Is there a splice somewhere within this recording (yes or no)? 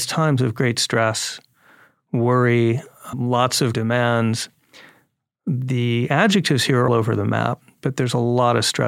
yes